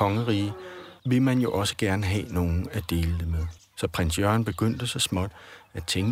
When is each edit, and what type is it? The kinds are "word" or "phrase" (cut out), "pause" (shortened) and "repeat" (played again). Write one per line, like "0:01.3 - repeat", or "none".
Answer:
0:01.0 - pause
0:03.6 - pause